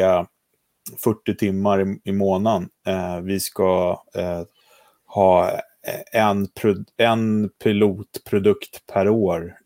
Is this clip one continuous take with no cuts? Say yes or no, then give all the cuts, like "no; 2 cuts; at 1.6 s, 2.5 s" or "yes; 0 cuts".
yes; 0 cuts